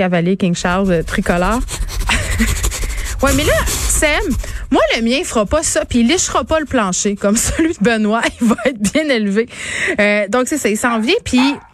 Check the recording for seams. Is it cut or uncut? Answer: uncut